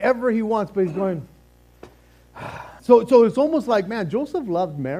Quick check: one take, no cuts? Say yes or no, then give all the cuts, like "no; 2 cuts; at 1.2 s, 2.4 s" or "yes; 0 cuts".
no; 1 cut; at 2.8 s